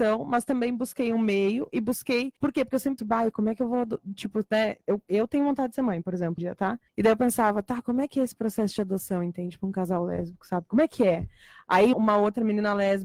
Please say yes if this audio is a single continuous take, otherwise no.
no